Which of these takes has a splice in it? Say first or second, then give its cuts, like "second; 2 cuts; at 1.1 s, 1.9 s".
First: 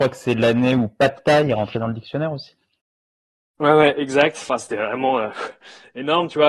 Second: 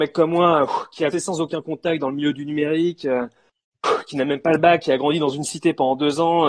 second; 1 cut; at 1.1 s